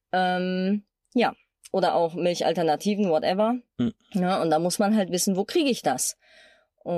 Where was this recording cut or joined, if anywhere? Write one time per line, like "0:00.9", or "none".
0:04.0